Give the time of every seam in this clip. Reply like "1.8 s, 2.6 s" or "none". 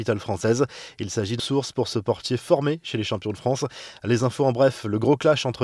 1.4 s